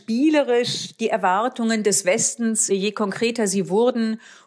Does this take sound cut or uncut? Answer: cut